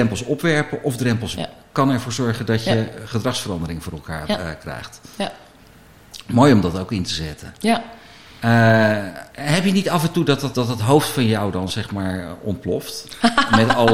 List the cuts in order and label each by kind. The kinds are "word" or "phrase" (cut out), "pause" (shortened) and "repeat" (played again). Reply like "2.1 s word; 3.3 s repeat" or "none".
1.3 s word; 9.3 s pause; 10.5 s word